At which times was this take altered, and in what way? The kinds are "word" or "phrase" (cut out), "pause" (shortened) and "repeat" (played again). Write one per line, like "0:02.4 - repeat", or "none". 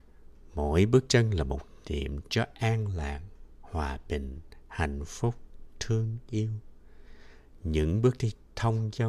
none